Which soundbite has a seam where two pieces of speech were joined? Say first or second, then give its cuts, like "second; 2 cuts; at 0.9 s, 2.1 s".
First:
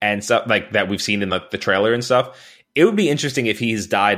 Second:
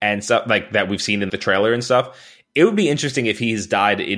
second; 1 cut; at 1.3 s